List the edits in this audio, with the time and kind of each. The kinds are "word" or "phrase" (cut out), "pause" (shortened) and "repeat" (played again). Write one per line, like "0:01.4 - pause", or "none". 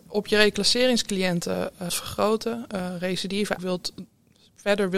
0:01.9 - word
0:03.6 - word